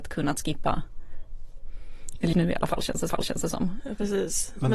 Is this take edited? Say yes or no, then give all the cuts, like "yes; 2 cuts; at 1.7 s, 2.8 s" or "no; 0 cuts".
yes; 2 cuts; at 2.3 s, 3.1 s